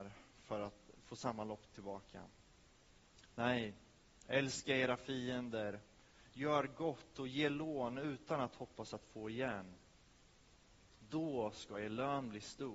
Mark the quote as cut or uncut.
uncut